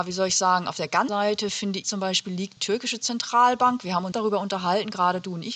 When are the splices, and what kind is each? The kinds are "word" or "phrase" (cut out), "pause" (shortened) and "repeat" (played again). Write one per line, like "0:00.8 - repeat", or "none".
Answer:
0:01.1 - word
0:01.8 - word
0:02.6 - word
0:04.1 - phrase